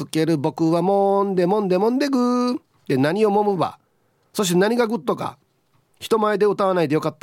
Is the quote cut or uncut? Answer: uncut